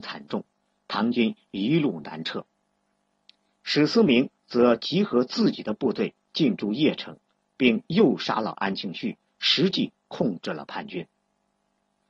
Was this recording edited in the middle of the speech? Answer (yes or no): no